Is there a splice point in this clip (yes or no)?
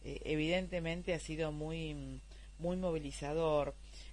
no